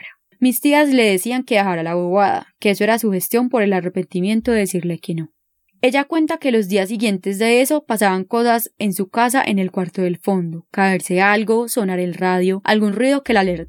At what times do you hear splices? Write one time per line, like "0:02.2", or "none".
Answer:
none